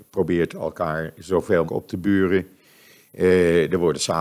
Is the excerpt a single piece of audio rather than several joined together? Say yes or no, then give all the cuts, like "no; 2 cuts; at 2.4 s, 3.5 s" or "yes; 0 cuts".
no; 1 cut; at 1.7 s